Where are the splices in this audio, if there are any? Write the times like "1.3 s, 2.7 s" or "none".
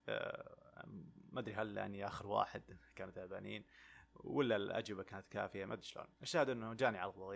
6.1 s